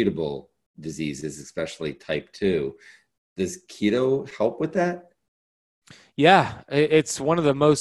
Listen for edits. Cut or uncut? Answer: uncut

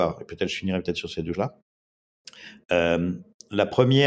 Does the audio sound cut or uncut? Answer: cut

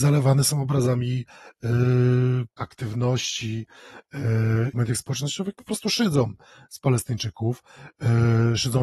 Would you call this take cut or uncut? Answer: cut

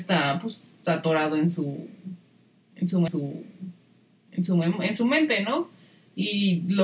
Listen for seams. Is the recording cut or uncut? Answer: cut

